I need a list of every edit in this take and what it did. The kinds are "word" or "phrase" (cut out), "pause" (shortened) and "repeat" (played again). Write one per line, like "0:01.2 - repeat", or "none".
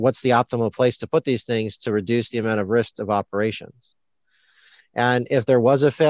none

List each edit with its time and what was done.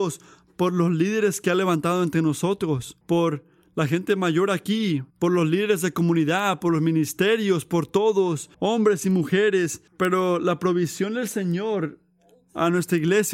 0:03.0 - pause
0:05.1 - pause
0:08.5 - pause
0:09.9 - pause

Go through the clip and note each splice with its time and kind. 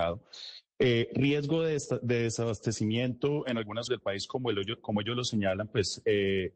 0:03.9 - word

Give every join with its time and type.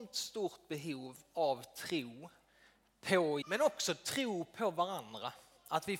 0:03.4 - word

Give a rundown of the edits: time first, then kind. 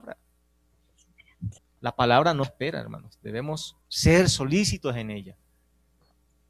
0:01.6 - pause
0:02.4 - word
0:03.8 - pause

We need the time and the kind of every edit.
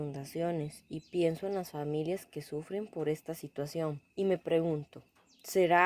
0:04.1 - pause

